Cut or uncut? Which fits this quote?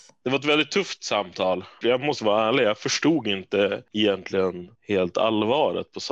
cut